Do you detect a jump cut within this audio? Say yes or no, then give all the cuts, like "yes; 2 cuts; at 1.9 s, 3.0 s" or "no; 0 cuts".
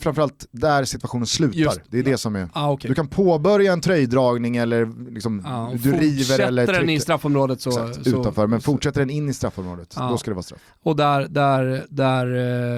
no; 0 cuts